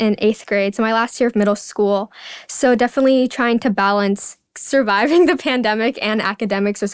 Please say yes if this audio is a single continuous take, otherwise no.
no